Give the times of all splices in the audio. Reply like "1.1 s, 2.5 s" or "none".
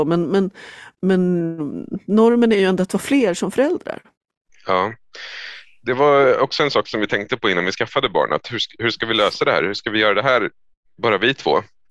none